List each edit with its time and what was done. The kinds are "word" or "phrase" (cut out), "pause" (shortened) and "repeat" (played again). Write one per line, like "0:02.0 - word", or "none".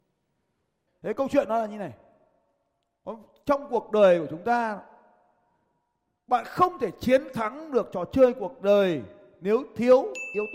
none